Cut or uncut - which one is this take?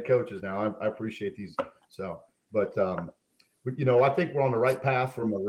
uncut